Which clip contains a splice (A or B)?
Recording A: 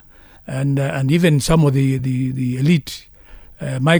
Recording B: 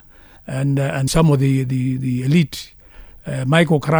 B